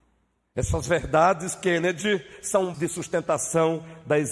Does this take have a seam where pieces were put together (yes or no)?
yes